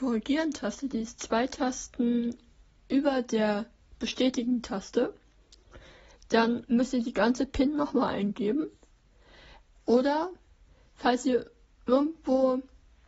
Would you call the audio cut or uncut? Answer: uncut